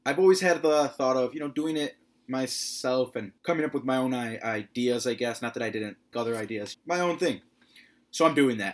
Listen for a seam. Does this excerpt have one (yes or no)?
yes